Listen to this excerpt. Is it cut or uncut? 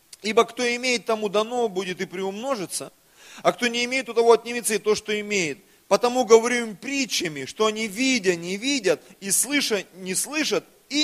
uncut